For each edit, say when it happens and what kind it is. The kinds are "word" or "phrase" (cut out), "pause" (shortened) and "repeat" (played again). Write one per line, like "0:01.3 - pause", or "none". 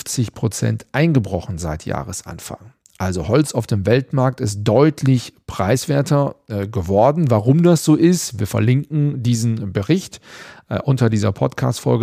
none